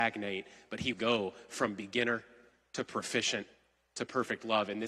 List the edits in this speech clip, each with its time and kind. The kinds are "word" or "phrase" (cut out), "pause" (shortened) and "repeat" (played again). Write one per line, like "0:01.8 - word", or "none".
0:00.9 - phrase